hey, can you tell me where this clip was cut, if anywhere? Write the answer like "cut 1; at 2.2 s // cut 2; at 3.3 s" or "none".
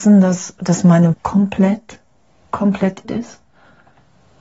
cut 1; at 1.1 s // cut 2; at 3.0 s